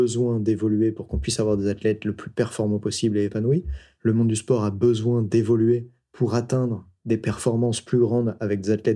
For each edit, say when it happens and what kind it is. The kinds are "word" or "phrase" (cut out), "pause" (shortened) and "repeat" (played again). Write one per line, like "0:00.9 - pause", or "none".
none